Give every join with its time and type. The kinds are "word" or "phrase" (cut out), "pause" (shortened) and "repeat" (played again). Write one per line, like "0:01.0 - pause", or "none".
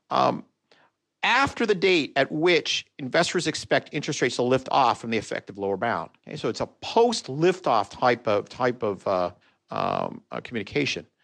0:06.2 - pause
0:09.4 - pause